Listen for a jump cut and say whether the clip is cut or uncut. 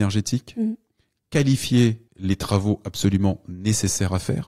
cut